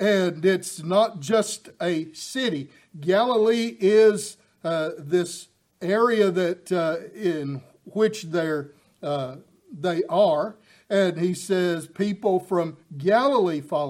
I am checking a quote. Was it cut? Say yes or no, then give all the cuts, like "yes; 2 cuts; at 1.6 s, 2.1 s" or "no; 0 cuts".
no; 0 cuts